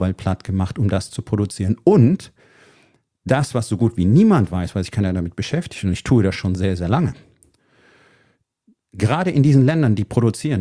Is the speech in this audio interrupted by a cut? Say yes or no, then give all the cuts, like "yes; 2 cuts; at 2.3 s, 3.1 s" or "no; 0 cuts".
no; 0 cuts